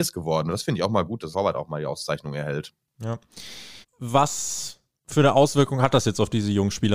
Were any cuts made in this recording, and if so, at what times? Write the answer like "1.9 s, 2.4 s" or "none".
1.3 s, 3.8 s

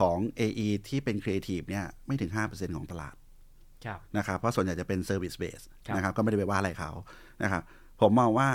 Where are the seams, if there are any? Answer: 2.0 s, 4.0 s

